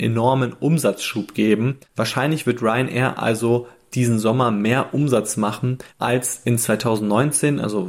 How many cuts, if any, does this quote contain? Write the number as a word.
one